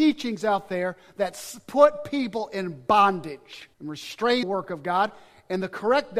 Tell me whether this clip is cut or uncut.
cut